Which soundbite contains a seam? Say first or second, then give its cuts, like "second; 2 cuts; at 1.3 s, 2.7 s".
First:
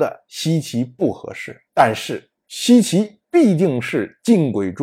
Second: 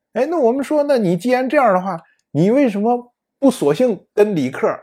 first; 1 cut; at 1.7 s